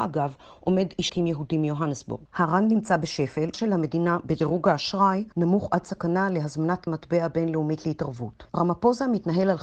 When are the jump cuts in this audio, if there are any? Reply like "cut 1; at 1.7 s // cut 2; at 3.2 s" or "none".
cut 1; at 1.1 s // cut 2; at 2.3 s // cut 3; at 3.5 s // cut 4; at 5.3 s // cut 5; at 6.9 s // cut 6; at 8.5 s

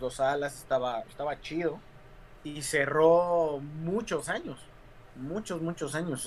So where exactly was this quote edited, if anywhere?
cut 1; at 2.4 s

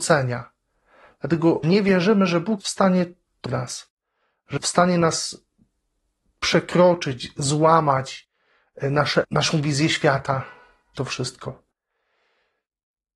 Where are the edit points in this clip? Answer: cut 1; at 1.6 s // cut 2; at 2.6 s // cut 3; at 3.5 s // cut 4; at 4.6 s // cut 5; at 9.2 s // cut 6; at 10.9 s

